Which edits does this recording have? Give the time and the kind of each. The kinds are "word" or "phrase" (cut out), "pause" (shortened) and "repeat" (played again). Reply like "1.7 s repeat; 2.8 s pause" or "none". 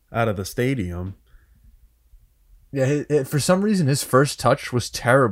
none